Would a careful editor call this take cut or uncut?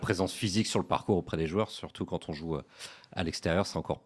uncut